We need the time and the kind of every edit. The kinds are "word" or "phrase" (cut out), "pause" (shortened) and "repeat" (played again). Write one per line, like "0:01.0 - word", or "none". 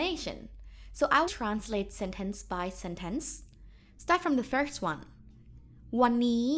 0:01.3 - word